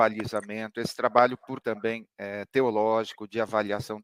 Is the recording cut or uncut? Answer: cut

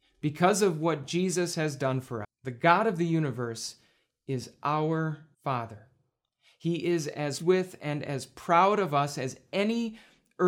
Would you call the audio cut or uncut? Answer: cut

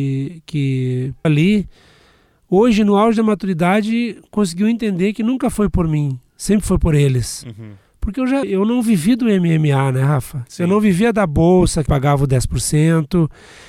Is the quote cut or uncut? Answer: cut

